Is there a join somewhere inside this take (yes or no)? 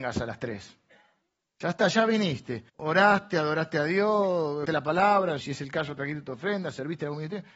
yes